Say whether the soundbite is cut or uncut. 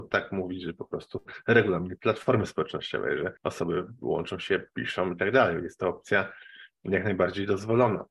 cut